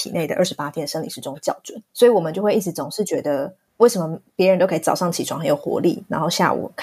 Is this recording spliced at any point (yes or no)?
yes